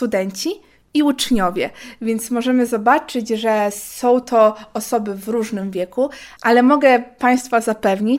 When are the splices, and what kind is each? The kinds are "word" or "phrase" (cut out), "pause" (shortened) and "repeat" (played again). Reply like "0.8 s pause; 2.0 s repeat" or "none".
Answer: none

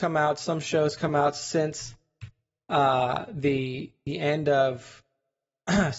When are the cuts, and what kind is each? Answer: none

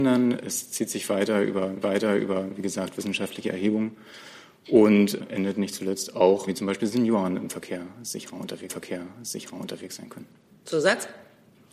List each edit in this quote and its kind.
1.8 s repeat; 5.2 s word; 6.5 s phrase; 8.7 s repeat

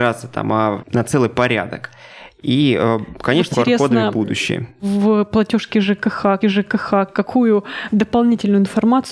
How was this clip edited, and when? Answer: 3.5 s word; 6.4 s repeat

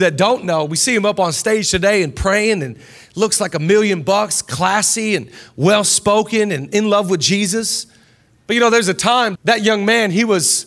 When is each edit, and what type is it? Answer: 9.4 s word

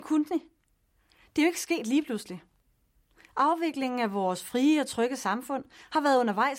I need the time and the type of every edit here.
none

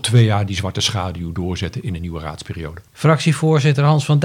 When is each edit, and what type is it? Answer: 2.9 s pause

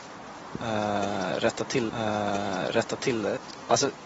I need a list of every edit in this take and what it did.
1.9 s repeat

